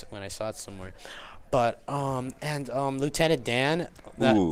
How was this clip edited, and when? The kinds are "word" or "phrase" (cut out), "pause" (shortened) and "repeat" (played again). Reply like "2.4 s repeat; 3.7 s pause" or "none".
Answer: none